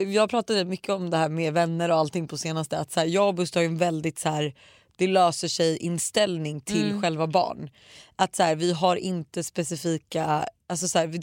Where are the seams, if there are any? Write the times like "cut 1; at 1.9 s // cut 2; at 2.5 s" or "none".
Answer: none